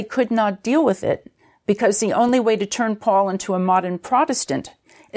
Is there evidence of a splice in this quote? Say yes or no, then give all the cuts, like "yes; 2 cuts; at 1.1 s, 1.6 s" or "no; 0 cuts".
no; 0 cuts